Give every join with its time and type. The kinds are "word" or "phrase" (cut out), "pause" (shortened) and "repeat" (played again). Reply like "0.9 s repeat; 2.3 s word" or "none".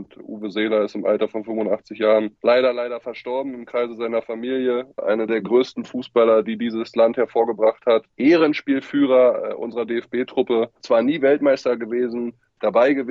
10.8 s pause